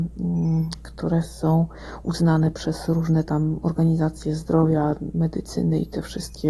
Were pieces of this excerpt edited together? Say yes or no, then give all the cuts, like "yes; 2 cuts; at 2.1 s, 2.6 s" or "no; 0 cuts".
no; 0 cuts